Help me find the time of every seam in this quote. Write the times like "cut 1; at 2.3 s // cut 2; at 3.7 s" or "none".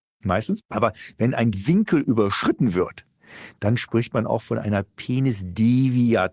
cut 1; at 1.5 s